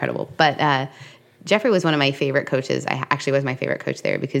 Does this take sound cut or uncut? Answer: uncut